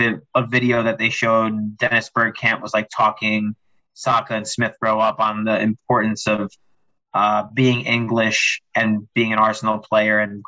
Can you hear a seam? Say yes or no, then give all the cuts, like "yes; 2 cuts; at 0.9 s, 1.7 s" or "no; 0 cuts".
no; 0 cuts